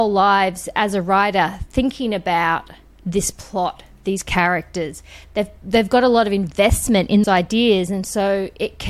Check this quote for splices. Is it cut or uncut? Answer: cut